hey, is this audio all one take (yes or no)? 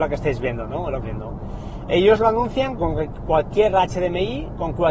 no